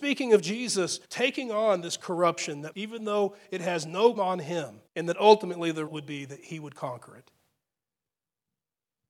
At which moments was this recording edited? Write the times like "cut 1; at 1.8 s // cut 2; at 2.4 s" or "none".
cut 1; at 1.0 s // cut 2; at 2.7 s // cut 3; at 4.2 s // cut 4; at 4.9 s // cut 5; at 5.9 s

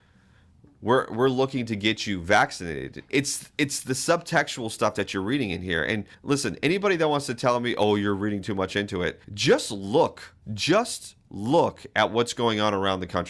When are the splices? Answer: cut 1; at 6.1 s // cut 2; at 9.2 s // cut 3; at 10.4 s

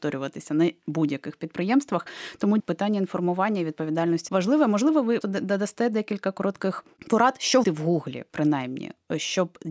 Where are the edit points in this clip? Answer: cut 1; at 2.6 s // cut 2; at 4.3 s // cut 3; at 5.2 s // cut 4; at 7.6 s

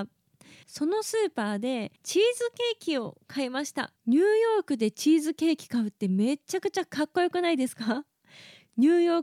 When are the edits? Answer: cut 1; at 2.0 s // cut 2; at 4.0 s

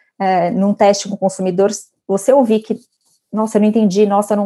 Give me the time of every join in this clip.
none

